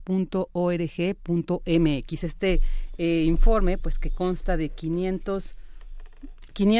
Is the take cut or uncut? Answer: uncut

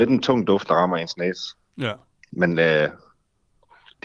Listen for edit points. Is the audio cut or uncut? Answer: uncut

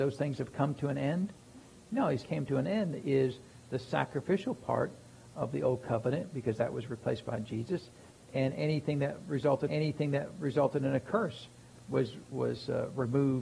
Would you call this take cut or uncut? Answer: cut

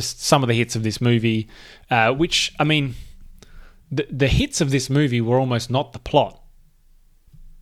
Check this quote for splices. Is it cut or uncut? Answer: uncut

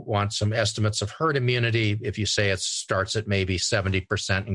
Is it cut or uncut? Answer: uncut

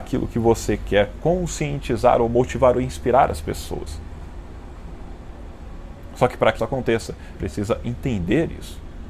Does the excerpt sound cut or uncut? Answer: cut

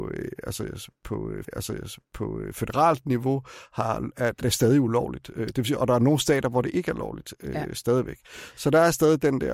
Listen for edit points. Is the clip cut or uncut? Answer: cut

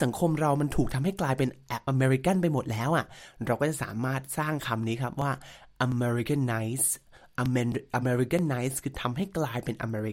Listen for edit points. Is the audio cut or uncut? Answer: uncut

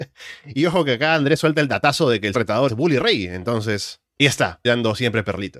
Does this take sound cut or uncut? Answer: cut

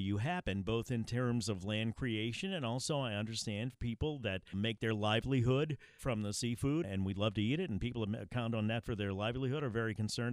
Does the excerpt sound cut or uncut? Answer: cut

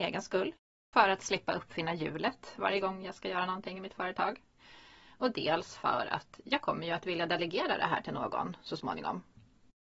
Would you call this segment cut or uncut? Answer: uncut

